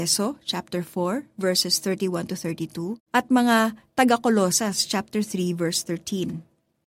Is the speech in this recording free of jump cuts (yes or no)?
no